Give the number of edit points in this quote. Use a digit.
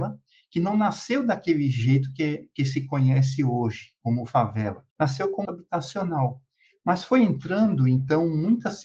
2